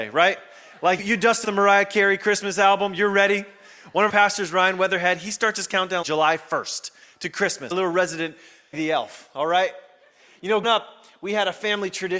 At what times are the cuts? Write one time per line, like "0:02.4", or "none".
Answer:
0:01.0
0:01.4
0:04.1
0:06.0
0:07.7
0:08.7
0:10.6